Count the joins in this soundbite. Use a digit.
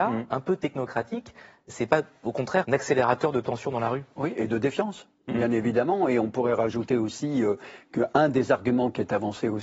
1